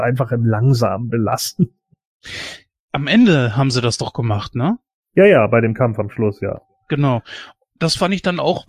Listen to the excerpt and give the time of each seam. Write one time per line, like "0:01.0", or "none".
none